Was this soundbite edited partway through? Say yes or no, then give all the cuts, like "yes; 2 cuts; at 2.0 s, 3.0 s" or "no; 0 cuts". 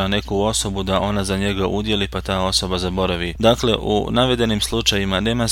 no; 0 cuts